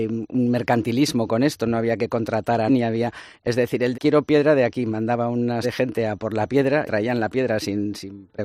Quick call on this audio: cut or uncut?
cut